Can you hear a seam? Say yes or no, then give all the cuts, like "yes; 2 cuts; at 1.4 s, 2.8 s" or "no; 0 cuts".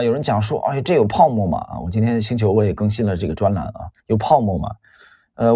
yes; 1 cut; at 4.0 s